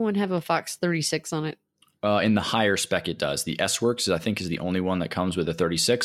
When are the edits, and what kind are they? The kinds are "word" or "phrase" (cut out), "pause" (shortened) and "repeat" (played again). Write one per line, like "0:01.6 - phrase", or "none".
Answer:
none